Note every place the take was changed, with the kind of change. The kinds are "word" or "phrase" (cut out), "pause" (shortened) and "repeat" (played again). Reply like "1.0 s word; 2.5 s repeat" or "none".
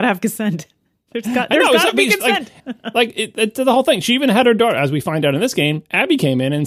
2.6 s pause